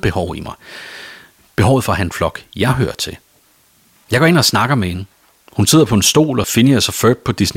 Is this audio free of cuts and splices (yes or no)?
no